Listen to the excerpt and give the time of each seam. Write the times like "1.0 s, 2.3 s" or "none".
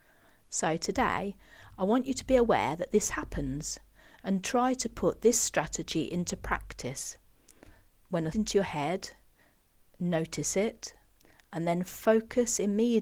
8.3 s